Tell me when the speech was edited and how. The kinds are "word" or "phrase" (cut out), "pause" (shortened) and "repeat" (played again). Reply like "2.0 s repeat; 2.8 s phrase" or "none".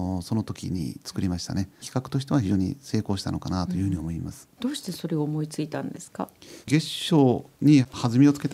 1.8 s phrase; 6.6 s pause